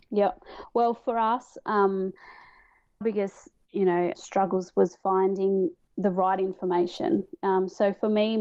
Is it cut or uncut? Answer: cut